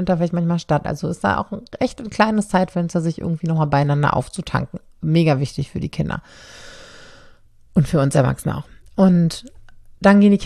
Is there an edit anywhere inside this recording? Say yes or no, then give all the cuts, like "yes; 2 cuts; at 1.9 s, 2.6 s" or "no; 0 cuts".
no; 0 cuts